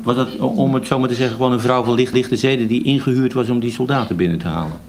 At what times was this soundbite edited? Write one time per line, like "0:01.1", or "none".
0:02.1

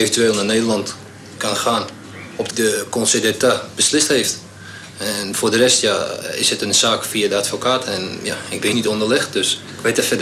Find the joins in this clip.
0:01.4
0:02.5
0:08.7

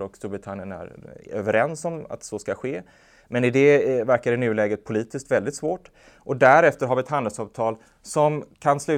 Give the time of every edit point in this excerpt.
none

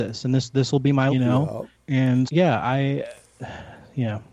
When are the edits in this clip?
0:01.1
0:01.7
0:02.3

